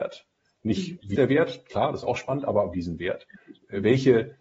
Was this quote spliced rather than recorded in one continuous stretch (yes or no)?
yes